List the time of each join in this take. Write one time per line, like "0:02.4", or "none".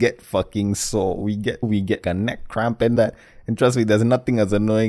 0:01.6
0:02.0
0:03.0